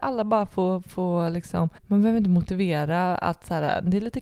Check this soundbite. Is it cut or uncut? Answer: cut